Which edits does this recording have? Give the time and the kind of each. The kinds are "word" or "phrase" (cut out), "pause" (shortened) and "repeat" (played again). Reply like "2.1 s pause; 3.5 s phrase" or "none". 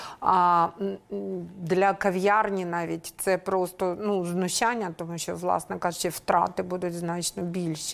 none

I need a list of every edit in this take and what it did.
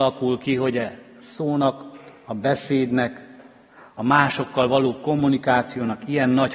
none

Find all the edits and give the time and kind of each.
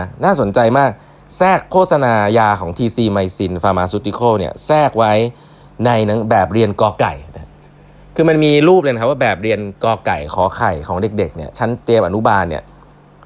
11.8 s pause

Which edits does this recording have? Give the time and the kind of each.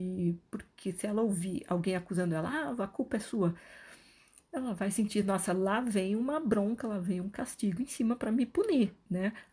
none

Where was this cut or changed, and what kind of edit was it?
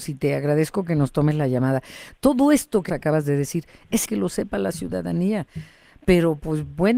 2.9 s word; 4.0 s word

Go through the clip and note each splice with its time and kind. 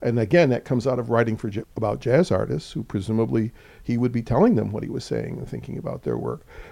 1.6 s word

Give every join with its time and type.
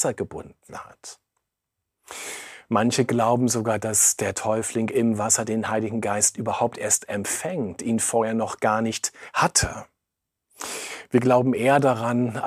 none

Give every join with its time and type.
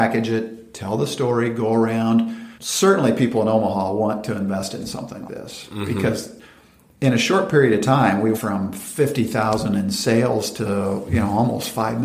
2.6 s pause; 5.3 s word; 8.3 s word

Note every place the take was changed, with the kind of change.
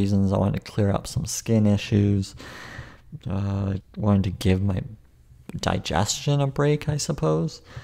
3.8 s word

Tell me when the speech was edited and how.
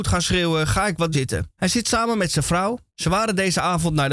1.1 s word; 1.5 s pause; 2.9 s pause

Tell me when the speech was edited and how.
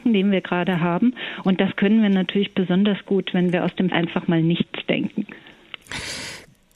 3.9 s phrase

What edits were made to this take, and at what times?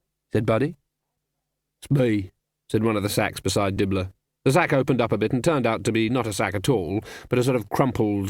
none

